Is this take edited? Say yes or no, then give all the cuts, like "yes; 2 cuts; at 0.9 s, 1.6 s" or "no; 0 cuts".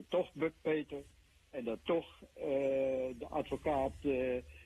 no; 0 cuts